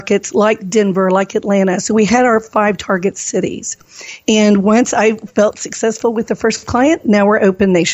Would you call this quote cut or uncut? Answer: uncut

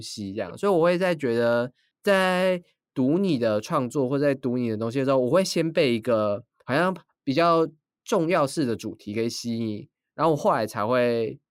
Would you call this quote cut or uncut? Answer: uncut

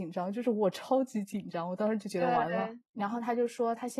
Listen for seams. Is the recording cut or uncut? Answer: cut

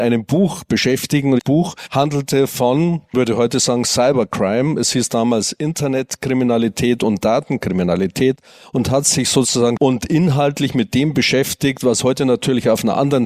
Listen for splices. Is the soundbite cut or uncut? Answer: cut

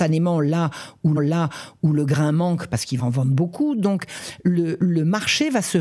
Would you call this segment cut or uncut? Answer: cut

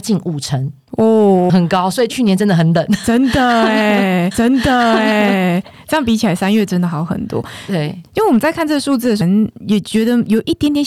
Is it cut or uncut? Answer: cut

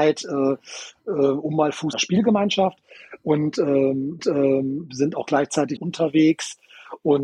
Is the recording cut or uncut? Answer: cut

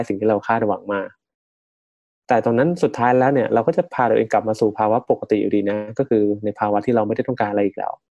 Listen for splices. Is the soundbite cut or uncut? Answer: uncut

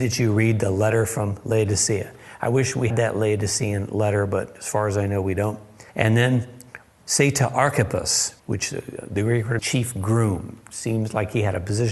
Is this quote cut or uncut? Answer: cut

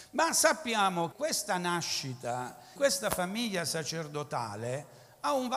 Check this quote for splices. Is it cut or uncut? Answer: cut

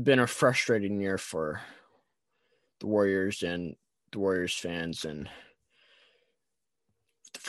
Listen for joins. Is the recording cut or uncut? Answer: uncut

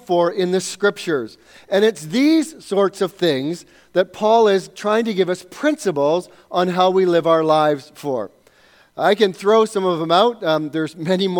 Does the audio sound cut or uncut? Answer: uncut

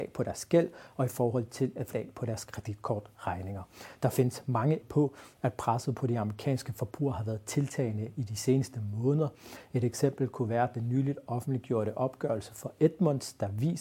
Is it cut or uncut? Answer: cut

